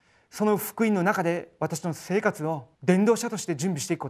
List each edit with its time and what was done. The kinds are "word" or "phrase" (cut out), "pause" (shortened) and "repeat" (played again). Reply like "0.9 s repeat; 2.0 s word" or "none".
2.7 s pause

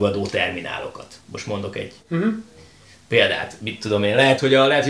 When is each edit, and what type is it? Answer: 1.2 s pause; 2.0 s pause

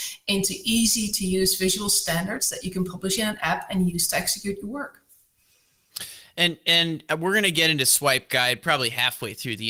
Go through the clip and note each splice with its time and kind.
none

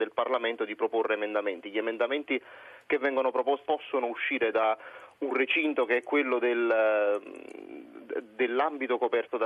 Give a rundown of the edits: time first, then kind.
3.7 s word

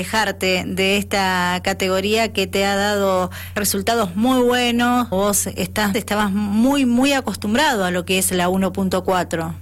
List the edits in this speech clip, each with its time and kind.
3.6 s word; 5.1 s phrase; 5.9 s phrase

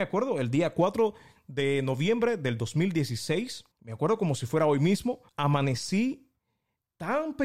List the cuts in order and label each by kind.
3.7 s pause; 5.3 s pause

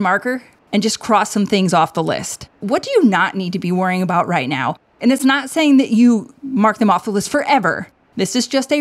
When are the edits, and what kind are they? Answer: 2.5 s pause

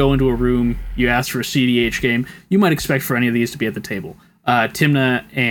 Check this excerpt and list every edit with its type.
none

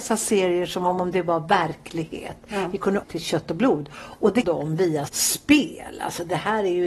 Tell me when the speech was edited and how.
3.0 s phrase; 4.4 s word; 5.1 s word

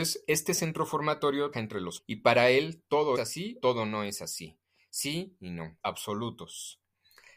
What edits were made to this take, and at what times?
1.5 s word; 2.0 s word; 3.2 s word; 3.6 s word; 5.8 s word

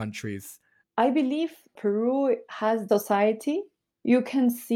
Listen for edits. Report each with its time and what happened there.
2.9 s phrase

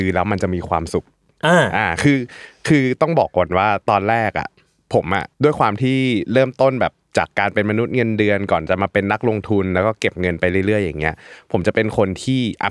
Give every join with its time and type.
5.3 s pause

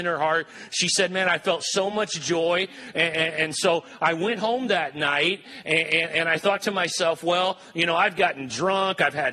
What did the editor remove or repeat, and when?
none

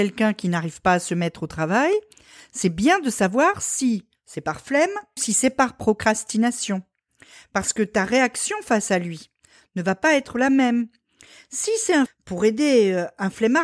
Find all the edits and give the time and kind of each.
5.2 s word; 12.1 s word

